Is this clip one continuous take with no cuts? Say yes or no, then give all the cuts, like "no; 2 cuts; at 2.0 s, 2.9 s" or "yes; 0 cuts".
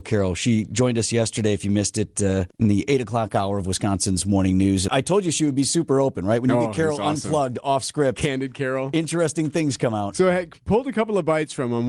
no; 2 cuts; at 2.5 s, 4.9 s